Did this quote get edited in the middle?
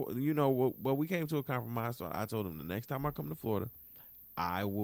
no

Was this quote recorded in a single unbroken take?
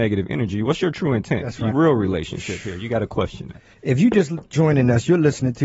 no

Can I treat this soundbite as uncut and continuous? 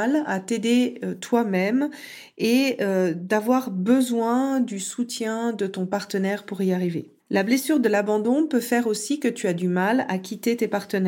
no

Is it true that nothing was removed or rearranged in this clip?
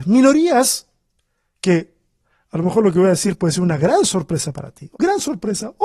no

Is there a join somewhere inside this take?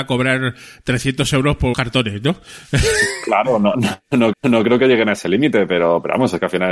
yes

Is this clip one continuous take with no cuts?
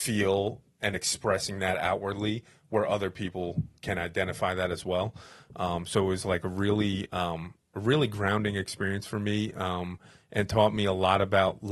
yes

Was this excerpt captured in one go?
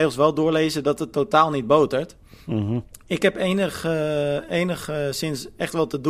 yes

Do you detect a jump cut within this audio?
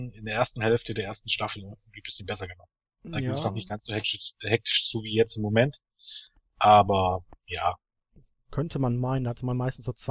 no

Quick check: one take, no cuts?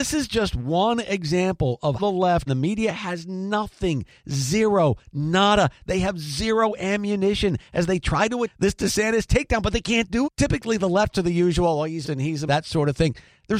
no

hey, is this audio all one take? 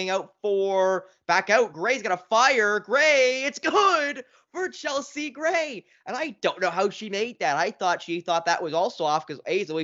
yes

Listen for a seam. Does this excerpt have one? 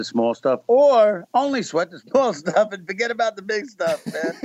no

